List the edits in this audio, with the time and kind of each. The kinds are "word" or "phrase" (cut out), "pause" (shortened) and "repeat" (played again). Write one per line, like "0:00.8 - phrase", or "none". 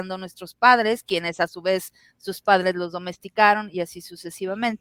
none